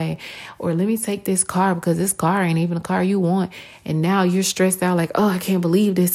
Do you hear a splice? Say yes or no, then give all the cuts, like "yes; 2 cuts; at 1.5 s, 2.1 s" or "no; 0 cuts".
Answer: no; 0 cuts